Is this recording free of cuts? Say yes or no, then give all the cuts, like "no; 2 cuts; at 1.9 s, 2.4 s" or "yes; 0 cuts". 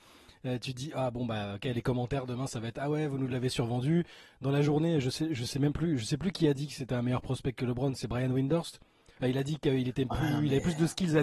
yes; 0 cuts